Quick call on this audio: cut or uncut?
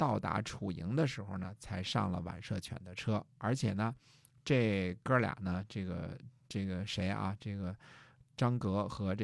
uncut